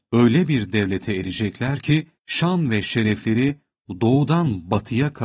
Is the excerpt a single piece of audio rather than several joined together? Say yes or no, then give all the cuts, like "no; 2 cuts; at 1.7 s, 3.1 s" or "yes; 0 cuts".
yes; 0 cuts